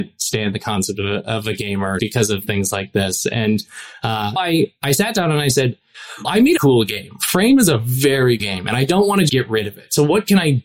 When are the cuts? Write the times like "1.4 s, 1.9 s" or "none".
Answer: 2.0 s, 4.4 s, 6.2 s, 6.6 s, 8.4 s, 9.3 s